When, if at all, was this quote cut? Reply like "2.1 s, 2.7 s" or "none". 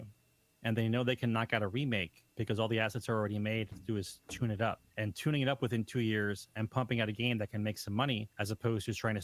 2.3 s, 3.7 s, 4.9 s, 8.3 s